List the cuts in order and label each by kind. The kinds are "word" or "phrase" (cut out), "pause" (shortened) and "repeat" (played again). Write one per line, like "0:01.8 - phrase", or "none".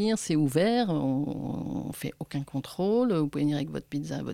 none